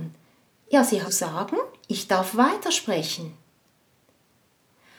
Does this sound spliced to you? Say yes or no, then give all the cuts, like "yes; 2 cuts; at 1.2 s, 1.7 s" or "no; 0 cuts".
yes; 1 cut; at 1.0 s